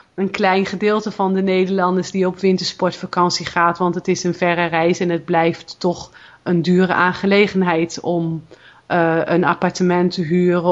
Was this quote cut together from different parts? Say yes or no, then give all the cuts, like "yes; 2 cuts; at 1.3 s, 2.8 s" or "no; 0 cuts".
no; 0 cuts